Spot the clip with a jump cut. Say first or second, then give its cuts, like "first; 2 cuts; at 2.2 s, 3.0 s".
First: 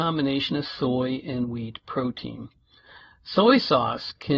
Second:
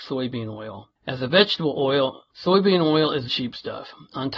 second; 3 cuts; at 1.0 s, 2.3 s, 3.3 s